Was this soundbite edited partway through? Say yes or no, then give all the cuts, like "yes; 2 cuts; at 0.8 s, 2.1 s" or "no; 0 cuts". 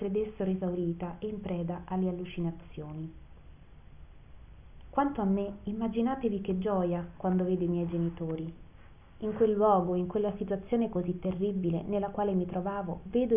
no; 0 cuts